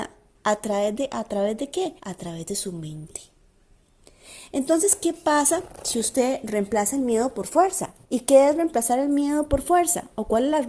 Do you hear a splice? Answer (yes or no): yes